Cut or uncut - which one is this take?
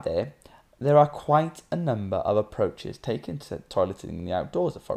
uncut